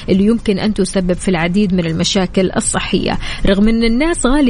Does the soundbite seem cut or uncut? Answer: uncut